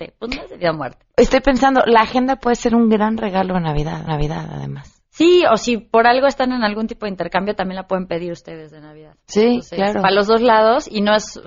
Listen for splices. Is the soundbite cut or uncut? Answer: cut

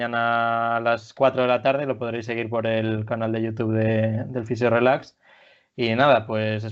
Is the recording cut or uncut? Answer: uncut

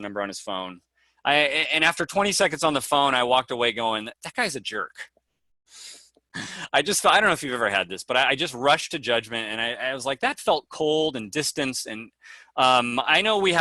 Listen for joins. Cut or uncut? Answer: uncut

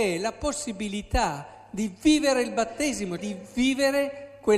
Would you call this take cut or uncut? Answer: cut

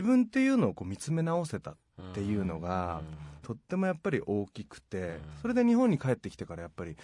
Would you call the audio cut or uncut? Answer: uncut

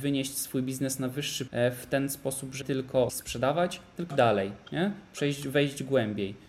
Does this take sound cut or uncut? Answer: cut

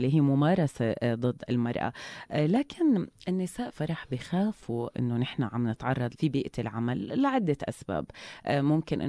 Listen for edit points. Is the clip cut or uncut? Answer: cut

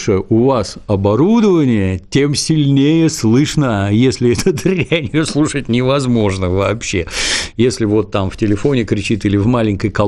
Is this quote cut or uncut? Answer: uncut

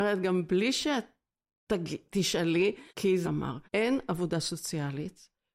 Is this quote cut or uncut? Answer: cut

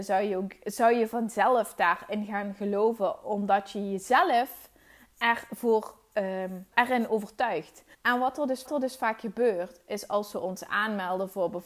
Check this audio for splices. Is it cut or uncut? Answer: cut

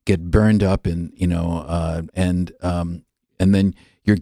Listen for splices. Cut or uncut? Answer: cut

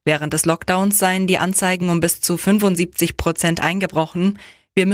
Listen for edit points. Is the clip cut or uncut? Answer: uncut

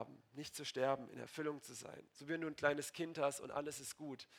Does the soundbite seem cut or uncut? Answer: uncut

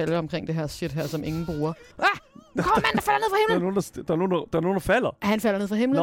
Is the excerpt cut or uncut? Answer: cut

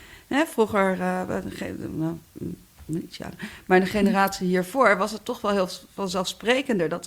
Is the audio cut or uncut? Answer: uncut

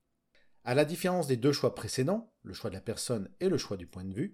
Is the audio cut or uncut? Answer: uncut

